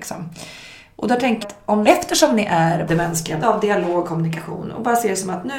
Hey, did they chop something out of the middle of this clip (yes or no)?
yes